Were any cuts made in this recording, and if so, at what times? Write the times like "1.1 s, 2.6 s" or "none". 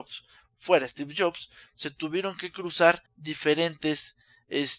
3.1 s